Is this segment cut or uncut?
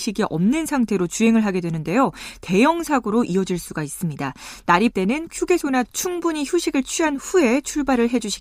cut